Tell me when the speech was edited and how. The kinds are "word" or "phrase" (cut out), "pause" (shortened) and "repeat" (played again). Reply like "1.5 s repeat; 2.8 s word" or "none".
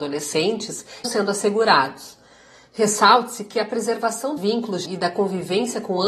1.0 s word; 4.4 s word; 4.8 s word